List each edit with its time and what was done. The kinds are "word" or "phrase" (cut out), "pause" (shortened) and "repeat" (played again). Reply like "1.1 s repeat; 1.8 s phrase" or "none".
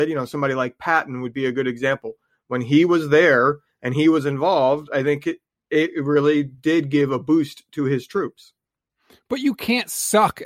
none